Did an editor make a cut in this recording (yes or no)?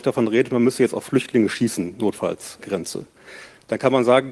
yes